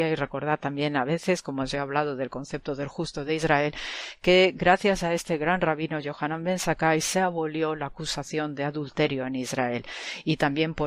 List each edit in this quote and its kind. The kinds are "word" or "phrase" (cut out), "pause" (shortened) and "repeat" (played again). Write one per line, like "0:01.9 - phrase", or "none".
none